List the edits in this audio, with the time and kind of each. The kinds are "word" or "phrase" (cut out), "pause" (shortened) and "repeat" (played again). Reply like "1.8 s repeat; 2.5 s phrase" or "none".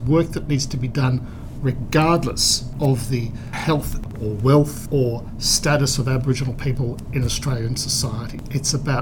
4.1 s word